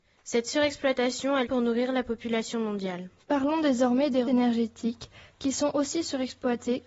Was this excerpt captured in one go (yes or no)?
no